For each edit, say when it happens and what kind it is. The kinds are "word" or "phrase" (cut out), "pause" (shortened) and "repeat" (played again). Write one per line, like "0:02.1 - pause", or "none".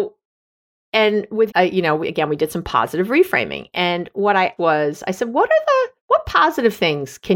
0:01.5 - word
0:04.6 - word
0:06.0 - pause